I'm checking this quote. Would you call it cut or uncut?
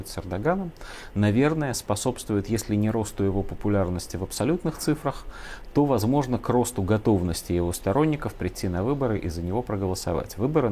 uncut